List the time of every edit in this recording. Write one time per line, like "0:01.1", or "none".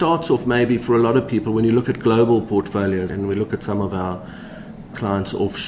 0:03.1